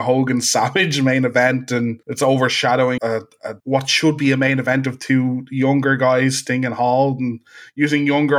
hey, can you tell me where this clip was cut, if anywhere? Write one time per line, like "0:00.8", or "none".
0:02.0
0:03.0
0:03.6